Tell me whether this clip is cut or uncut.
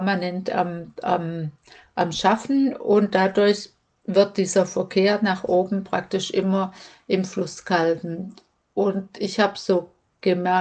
uncut